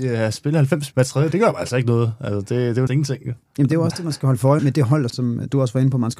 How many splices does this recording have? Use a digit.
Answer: 5